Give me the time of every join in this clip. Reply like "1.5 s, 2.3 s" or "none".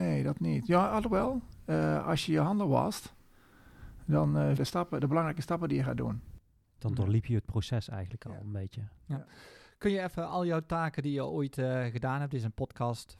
4.6 s